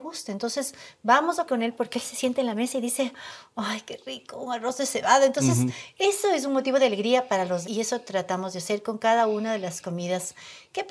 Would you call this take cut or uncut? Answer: cut